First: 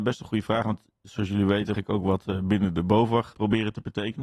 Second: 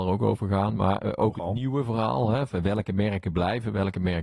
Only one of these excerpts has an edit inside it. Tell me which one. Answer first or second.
first